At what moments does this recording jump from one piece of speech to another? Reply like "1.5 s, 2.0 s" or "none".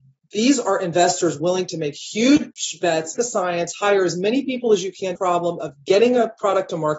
3.2 s, 5.2 s